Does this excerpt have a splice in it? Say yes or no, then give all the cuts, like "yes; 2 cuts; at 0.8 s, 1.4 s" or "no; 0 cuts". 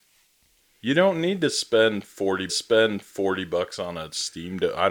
yes; 1 cut; at 2.5 s